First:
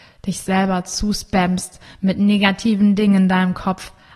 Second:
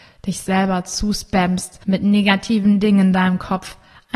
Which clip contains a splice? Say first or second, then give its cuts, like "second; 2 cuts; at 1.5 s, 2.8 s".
second; 1 cut; at 1.8 s